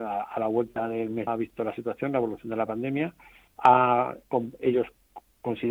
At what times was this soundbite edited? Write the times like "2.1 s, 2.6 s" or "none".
1.3 s